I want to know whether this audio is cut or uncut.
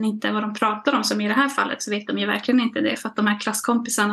uncut